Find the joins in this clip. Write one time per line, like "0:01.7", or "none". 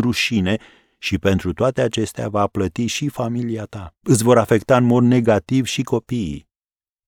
0:04.0